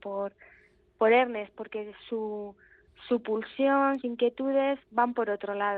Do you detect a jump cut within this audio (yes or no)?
yes